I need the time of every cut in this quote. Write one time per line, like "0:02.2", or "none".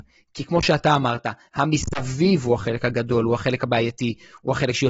none